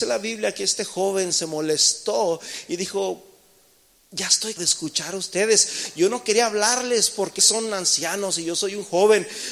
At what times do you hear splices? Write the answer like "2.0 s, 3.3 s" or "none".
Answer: 4.6 s, 7.4 s

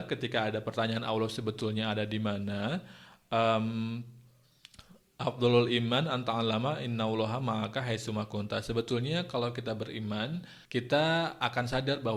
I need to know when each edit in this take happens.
10.6 s

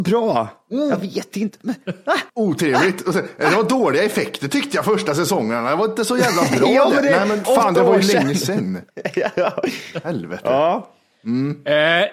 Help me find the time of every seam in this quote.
2.3 s, 7.4 s, 8.9 s

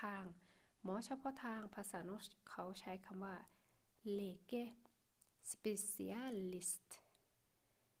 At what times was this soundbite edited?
none

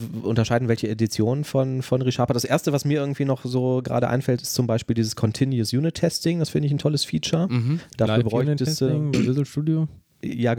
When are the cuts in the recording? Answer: none

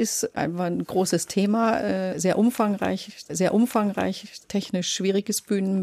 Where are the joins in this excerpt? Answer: 3.3 s

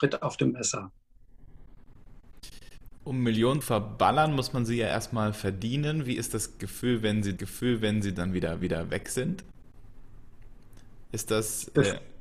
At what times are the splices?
3.6 s, 7.4 s, 8.6 s

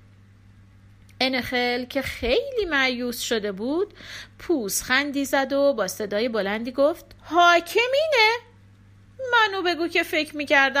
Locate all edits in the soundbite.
7.2 s

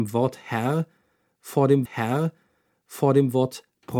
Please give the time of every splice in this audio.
1.9 s

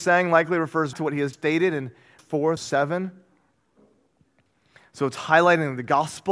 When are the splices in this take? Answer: 0.9 s, 1.3 s, 2.2 s, 2.6 s

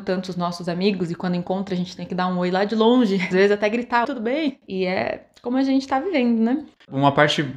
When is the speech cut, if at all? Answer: 3.3 s, 4.0 s

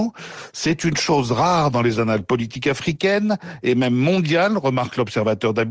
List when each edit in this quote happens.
none

